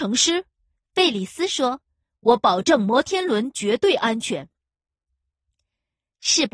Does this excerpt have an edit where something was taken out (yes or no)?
no